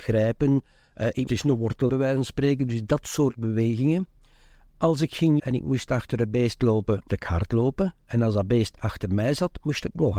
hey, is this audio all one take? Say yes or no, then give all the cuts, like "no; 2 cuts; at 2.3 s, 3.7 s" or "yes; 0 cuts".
no; 4 cuts; at 1.3 s, 1.9 s, 5.4 s, 7.1 s